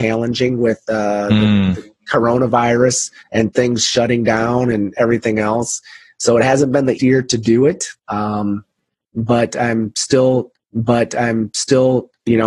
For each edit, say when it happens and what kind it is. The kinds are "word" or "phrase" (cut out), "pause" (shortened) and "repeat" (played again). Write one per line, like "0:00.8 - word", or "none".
0:03.2 - pause
0:07.0 - word
0:08.0 - pause
0:10.6 - repeat